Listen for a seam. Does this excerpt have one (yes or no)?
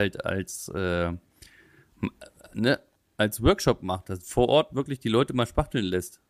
no